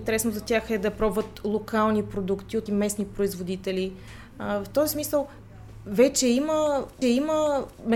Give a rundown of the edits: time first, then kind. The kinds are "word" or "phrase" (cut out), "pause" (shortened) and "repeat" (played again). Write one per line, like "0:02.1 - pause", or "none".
0:02.7 - word
0:07.0 - repeat